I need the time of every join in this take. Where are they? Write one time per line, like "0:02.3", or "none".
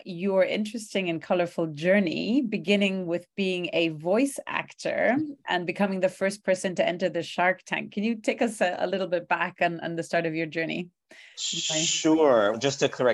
none